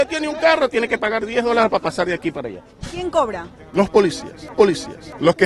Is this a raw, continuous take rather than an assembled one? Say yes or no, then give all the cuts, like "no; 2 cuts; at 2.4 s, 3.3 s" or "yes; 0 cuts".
no; 1 cut; at 4.5 s